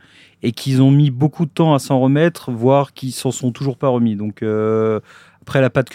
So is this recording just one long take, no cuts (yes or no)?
yes